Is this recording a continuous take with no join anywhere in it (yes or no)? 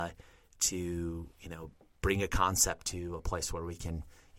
yes